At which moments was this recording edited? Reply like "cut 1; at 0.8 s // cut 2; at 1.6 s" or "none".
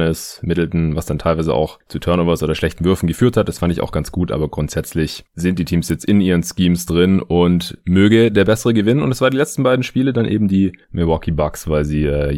none